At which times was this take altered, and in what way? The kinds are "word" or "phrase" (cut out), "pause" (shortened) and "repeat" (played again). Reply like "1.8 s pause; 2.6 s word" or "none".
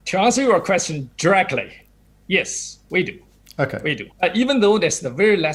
2.1 s word; 4.1 s pause